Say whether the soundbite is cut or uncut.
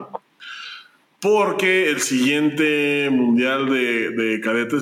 uncut